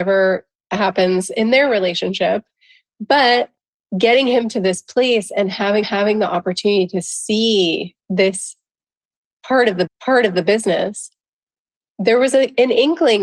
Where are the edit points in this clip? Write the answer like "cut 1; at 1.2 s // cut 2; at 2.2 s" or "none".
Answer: cut 1; at 5.8 s // cut 2; at 9.9 s